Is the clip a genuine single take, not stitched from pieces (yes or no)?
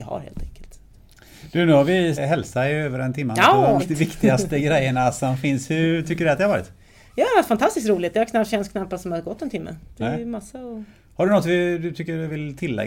no